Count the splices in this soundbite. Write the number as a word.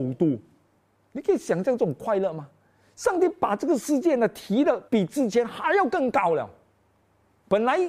one